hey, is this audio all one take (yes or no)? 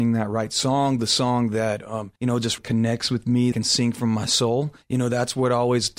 no